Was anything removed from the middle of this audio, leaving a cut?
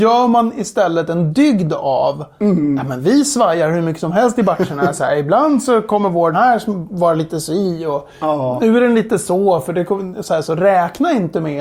yes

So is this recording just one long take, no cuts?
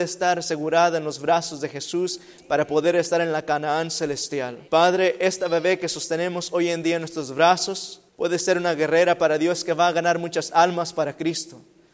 no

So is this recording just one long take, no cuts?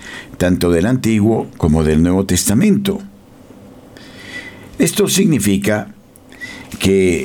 yes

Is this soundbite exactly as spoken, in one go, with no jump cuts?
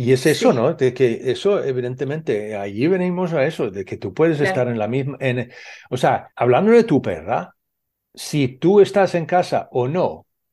no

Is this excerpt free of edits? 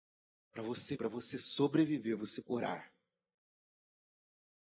no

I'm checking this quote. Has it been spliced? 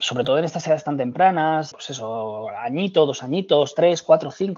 yes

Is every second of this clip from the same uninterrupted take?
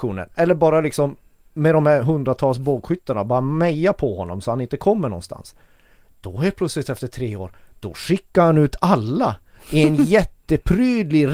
yes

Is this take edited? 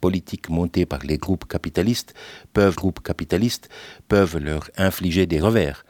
yes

